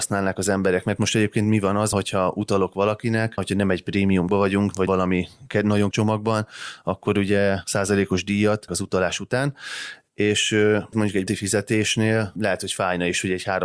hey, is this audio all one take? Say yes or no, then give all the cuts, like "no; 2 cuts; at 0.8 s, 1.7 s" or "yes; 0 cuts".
no; 9 cuts; at 1.9 s, 3.4 s, 4.3 s, 4.9 s, 5.9 s, 7.6 s, 8.7 s, 10.9 s, 11.3 s